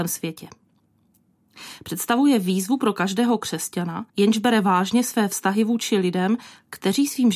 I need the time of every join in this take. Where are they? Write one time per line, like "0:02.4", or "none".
0:04.1